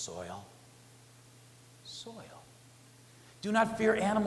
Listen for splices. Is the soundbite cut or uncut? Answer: uncut